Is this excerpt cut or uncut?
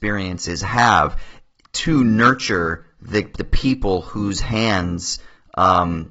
uncut